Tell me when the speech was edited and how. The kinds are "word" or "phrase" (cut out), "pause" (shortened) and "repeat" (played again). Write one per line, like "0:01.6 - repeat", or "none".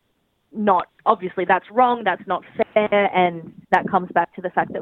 0:03.6 - pause